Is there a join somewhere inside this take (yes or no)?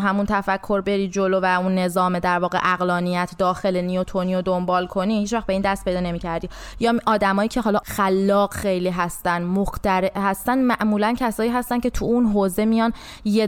no